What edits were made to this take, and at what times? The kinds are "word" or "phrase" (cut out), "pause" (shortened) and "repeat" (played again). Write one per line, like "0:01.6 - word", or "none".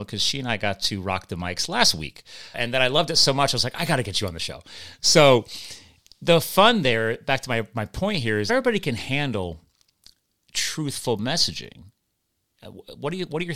0:02.5 - word
0:08.5 - phrase